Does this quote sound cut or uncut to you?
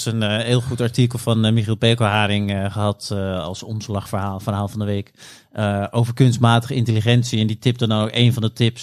uncut